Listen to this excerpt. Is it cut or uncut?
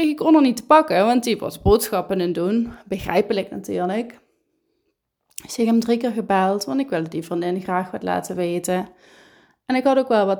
uncut